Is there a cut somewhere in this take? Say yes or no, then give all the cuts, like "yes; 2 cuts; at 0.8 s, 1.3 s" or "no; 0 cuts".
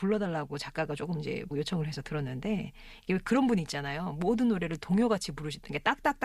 yes; 1 cut; at 1.5 s